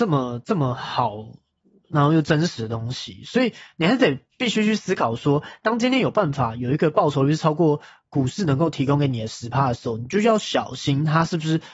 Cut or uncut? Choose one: uncut